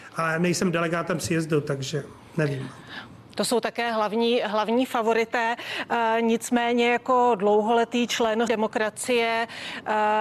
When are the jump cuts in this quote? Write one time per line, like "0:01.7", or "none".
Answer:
0:08.5